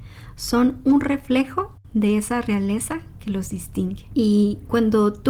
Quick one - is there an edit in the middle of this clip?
no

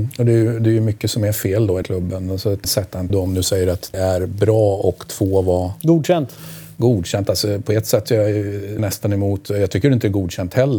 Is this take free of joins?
no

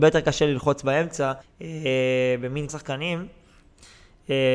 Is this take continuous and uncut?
no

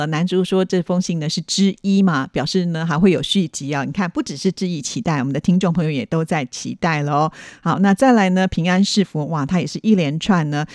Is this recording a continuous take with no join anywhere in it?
yes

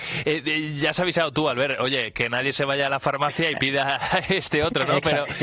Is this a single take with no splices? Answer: yes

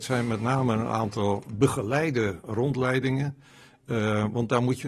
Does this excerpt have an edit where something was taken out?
no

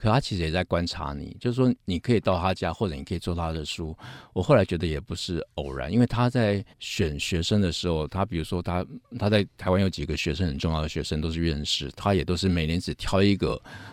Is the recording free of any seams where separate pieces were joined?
no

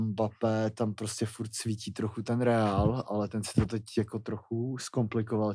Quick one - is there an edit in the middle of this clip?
no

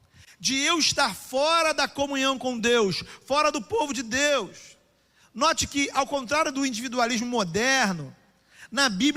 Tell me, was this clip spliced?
no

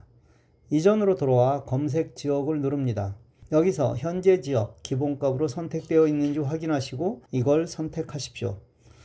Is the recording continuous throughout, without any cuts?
no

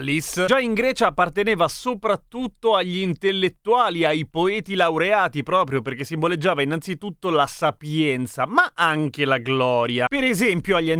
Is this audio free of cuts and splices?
yes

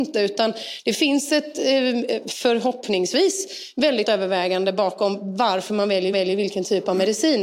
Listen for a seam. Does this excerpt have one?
yes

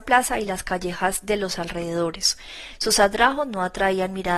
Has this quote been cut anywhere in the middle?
no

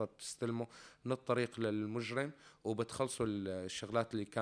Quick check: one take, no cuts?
yes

